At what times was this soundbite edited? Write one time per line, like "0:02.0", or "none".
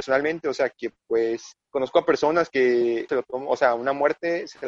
0:01.6
0:03.1